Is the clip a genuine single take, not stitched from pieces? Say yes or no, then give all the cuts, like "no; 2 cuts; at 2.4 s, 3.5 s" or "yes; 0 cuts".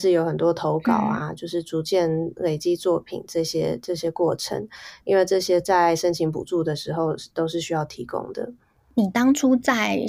yes; 0 cuts